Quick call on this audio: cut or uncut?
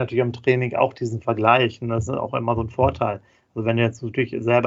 uncut